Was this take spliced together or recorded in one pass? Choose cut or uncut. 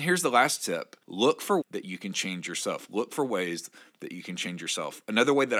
cut